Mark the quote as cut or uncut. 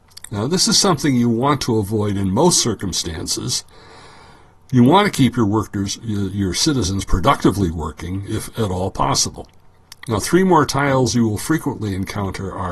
uncut